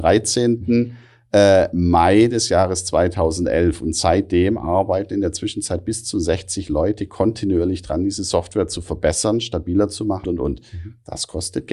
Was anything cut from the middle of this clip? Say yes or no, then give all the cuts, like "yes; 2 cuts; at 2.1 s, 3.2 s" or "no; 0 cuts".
yes; 1 cut; at 10.2 s